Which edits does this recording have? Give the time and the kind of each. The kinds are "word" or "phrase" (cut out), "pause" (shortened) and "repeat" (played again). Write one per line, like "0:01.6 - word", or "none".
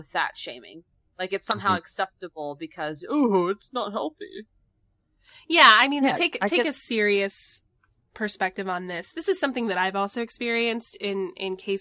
none

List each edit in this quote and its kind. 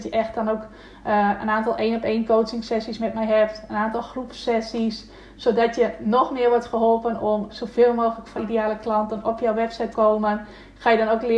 0:07.5 - word
0:08.4 - word
0:09.9 - word

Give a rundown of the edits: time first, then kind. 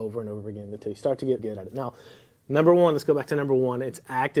0:01.4 - word

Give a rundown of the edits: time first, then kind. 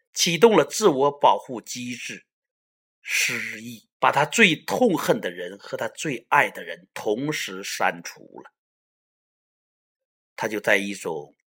0:03.9 - pause

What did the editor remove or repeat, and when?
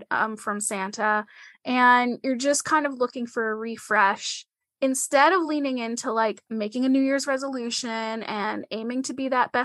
none

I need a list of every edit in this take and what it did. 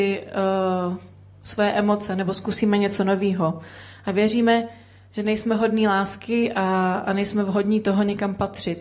none

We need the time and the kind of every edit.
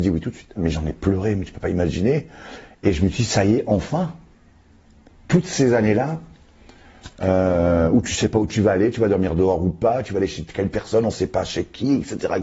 none

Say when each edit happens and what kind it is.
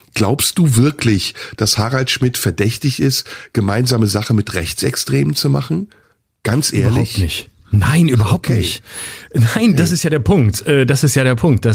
none

